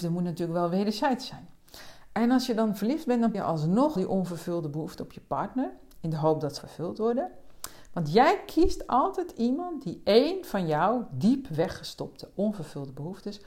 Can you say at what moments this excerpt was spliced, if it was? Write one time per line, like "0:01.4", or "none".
0:03.3
0:04.0
0:06.6